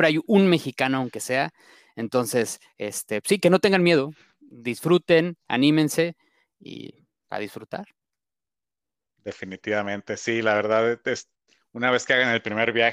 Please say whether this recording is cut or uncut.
uncut